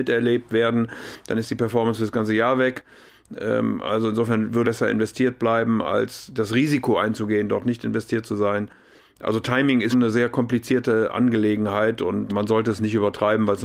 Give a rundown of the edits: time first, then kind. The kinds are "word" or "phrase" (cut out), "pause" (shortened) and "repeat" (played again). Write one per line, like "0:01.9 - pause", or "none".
0:04.6 - word
0:09.9 - word
0:12.3 - word